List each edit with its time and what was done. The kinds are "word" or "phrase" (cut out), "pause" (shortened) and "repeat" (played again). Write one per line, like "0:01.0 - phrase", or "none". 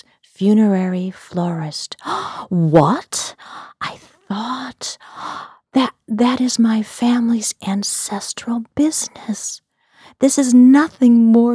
none